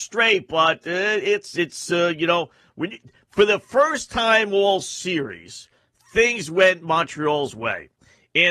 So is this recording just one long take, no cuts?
yes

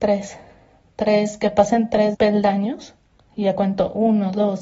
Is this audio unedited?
no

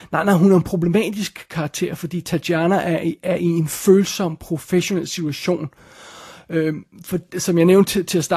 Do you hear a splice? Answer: no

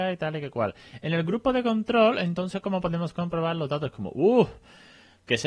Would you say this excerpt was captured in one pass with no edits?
yes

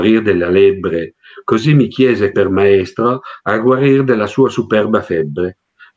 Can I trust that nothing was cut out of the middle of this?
no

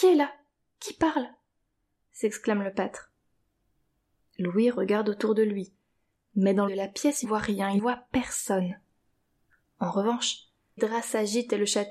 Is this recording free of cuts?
no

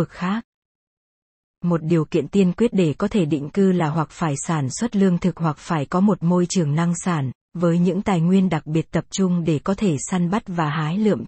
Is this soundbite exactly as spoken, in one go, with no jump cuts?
yes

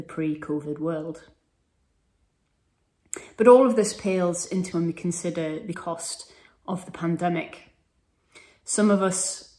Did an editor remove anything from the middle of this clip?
yes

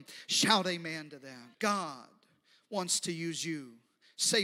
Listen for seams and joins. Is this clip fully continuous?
no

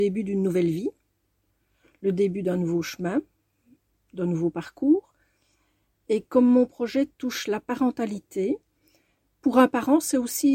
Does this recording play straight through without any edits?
yes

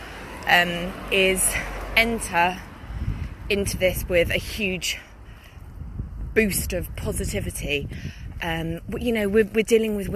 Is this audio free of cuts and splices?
yes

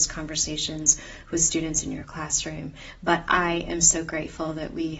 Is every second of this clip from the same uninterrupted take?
yes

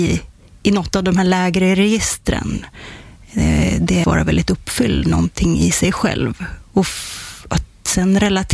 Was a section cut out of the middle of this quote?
yes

